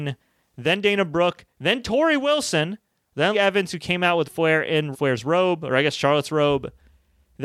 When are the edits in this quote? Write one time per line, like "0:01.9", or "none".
0:03.3
0:04.2
0:04.9